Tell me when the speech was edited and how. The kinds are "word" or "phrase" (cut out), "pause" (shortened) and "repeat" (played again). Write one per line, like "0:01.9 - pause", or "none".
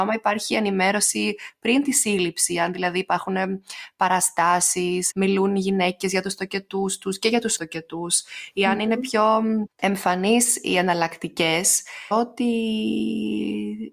0:05.1 - word
0:07.6 - word
0:09.7 - pause
0:12.1 - word